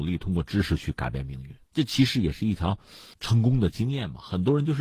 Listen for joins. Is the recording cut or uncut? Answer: cut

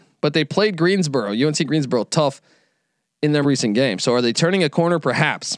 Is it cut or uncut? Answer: cut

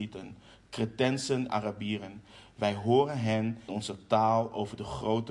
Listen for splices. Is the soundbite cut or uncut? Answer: cut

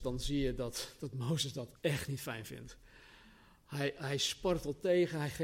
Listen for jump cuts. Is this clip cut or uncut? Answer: cut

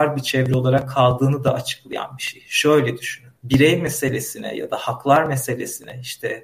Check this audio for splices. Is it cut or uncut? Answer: cut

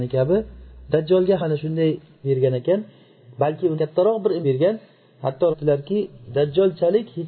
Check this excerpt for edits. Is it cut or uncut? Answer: cut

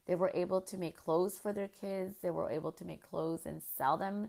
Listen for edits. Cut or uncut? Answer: uncut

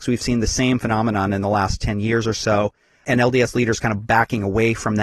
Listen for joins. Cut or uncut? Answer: uncut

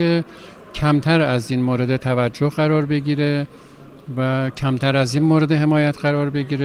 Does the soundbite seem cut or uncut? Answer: uncut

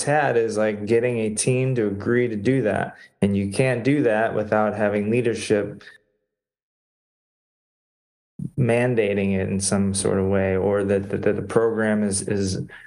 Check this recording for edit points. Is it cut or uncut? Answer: uncut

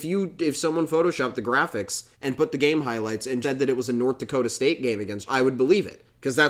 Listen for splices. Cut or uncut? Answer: cut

